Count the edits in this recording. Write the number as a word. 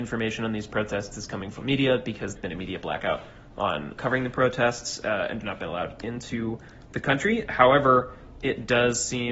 three